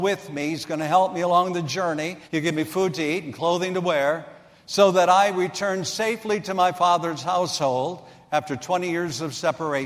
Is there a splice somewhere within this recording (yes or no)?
yes